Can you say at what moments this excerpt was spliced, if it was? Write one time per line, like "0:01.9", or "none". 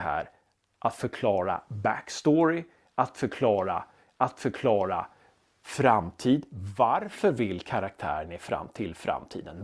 0:04.0